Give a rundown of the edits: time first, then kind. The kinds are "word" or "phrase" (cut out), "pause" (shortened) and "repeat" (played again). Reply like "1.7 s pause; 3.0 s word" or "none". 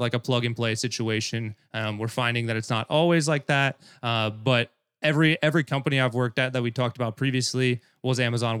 none